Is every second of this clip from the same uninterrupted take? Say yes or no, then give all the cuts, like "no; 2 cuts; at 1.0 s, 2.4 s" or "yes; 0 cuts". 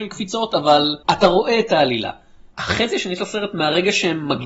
no; 2 cuts; at 1.0 s, 2.5 s